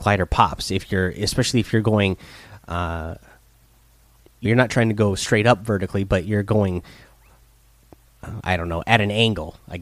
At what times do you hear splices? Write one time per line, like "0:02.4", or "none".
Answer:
0:04.4